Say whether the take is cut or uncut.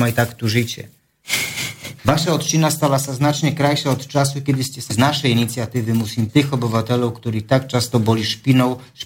cut